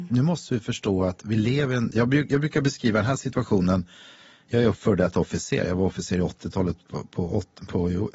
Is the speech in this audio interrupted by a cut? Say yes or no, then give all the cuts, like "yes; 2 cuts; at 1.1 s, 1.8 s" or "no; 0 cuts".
no; 0 cuts